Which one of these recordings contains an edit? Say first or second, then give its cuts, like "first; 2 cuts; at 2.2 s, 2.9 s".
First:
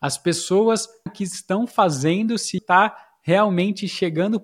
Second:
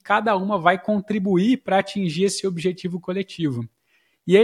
first; 2 cuts; at 1.1 s, 2.6 s